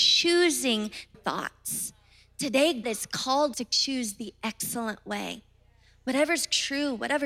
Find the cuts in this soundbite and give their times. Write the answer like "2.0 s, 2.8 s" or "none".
1.1 s, 2.8 s, 3.5 s